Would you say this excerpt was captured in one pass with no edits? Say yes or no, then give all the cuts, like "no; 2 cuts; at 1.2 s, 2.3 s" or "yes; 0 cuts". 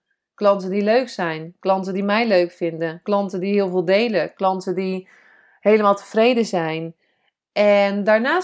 yes; 0 cuts